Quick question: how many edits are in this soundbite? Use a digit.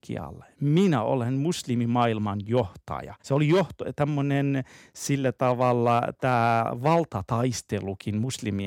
1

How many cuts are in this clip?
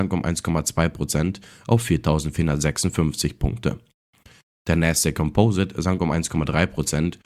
0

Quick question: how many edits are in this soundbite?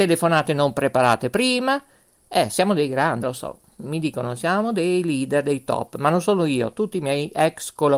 1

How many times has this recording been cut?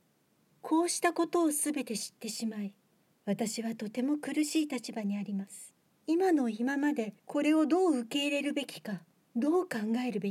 2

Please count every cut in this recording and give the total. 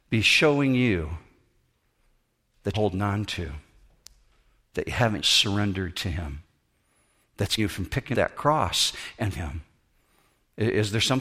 5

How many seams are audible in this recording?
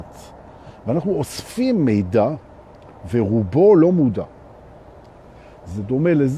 0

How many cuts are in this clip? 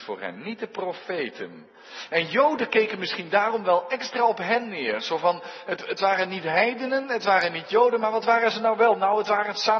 0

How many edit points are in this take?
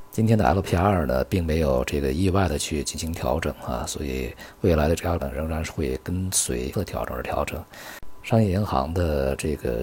2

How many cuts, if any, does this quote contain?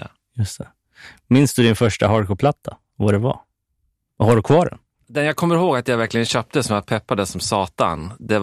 0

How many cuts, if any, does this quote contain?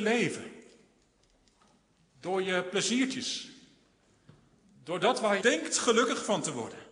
1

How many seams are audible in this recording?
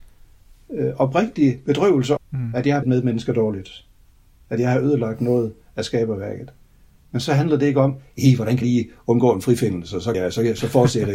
4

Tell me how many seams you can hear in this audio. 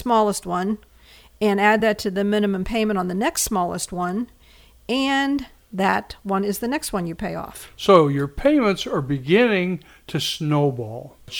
0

